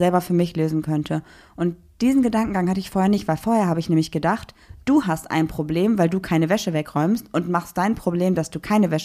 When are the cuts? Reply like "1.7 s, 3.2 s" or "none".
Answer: none